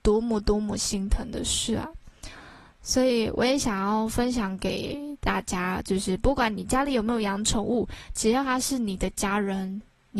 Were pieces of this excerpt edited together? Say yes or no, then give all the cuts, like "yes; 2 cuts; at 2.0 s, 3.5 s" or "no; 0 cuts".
no; 0 cuts